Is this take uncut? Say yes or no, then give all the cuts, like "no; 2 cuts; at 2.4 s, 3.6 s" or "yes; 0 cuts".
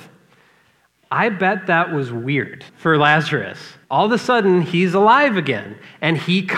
no; 2 cuts; at 2.7 s, 3.8 s